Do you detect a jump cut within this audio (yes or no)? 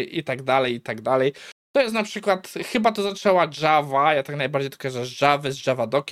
no